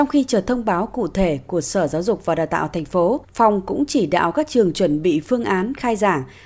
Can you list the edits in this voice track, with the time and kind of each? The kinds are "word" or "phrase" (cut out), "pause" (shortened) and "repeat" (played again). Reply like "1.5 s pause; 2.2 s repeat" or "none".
3.2 s pause